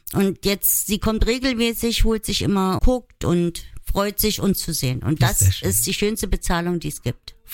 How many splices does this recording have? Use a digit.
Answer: 1